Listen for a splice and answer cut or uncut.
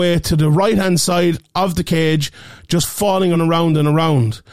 cut